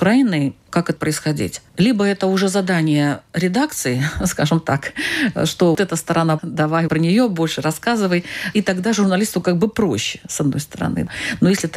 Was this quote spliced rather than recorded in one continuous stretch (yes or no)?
yes